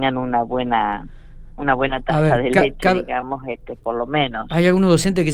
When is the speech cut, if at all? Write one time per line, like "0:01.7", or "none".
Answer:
none